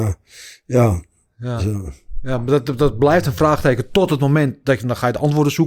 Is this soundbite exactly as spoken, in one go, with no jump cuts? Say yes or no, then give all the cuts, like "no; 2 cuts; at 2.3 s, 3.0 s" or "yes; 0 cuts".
yes; 0 cuts